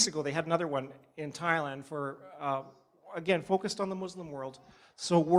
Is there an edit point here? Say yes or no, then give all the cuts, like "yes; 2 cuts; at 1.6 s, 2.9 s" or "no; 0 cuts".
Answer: no; 0 cuts